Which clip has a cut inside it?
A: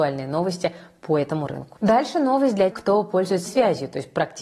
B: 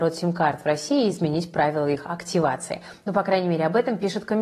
A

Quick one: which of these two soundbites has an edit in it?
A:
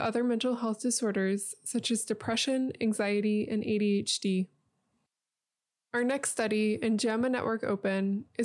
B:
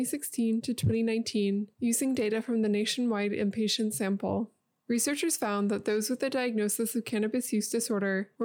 A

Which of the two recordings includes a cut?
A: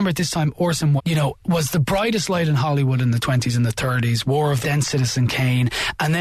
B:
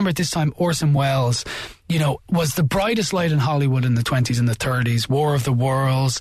A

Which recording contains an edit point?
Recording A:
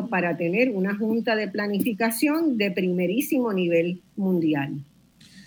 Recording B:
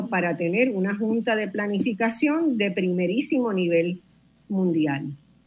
A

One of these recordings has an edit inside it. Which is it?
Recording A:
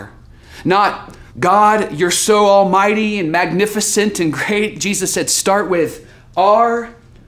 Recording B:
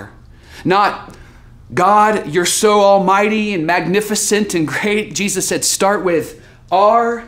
A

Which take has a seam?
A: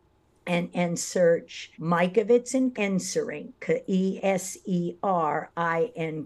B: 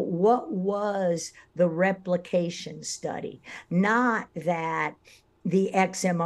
A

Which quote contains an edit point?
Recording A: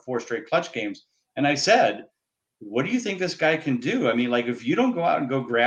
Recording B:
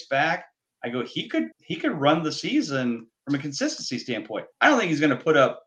B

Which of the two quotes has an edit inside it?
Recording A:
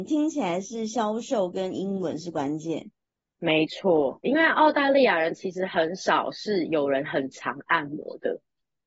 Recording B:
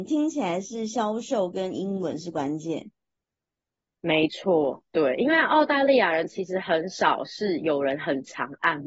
A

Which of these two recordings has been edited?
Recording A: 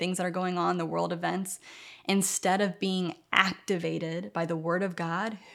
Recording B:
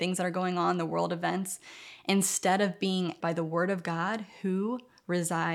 B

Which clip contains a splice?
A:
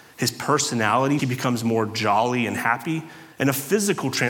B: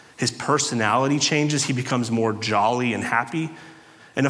A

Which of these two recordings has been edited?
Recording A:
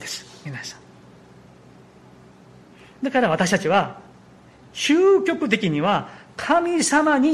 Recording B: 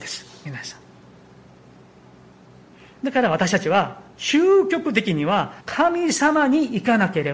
B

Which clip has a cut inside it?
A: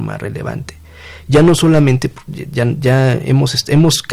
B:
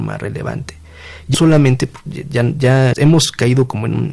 B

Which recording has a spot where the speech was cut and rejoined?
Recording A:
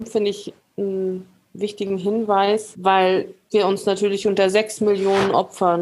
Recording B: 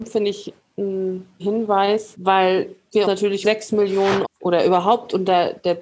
B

